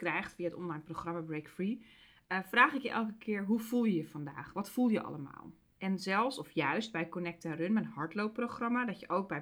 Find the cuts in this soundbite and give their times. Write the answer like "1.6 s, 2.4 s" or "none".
none

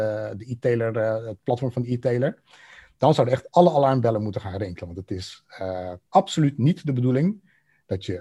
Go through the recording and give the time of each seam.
6.1 s

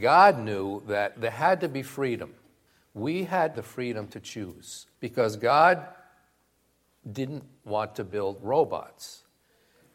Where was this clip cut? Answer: 1.1 s, 2.7 s, 3.5 s, 4.9 s

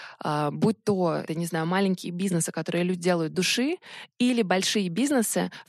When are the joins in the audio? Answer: 1.3 s, 3.3 s

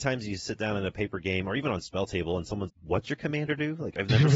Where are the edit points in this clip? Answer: 2.7 s

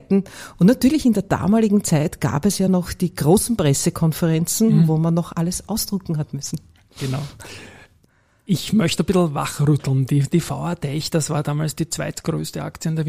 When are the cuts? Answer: none

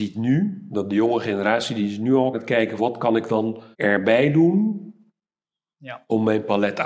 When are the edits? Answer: 2.3 s, 2.8 s, 3.7 s

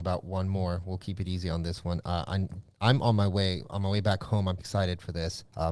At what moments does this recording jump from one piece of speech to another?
4.6 s

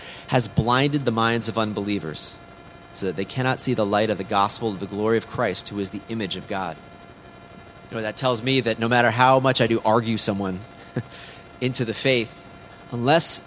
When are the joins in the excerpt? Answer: 9.7 s

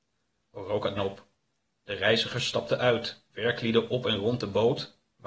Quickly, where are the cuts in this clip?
1.0 s, 3.3 s

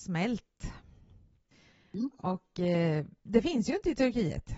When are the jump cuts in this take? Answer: none

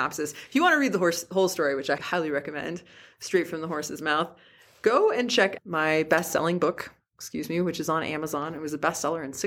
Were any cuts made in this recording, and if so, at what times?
2.0 s, 5.6 s

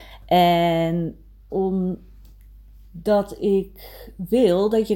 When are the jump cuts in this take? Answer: 1.5 s

